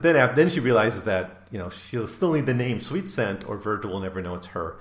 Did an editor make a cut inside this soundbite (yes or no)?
no